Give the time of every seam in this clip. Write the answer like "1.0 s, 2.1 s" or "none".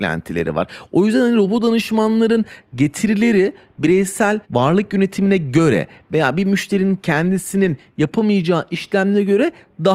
4.4 s